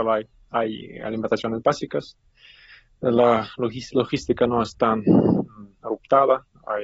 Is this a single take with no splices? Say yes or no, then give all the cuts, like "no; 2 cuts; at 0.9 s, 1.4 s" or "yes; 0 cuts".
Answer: yes; 0 cuts